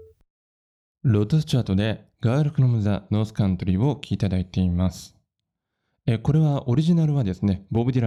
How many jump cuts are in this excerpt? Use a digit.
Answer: 0